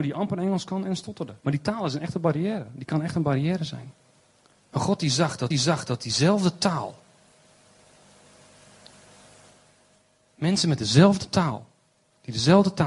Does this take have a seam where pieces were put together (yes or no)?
yes